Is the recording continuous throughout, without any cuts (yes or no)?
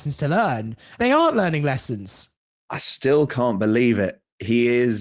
yes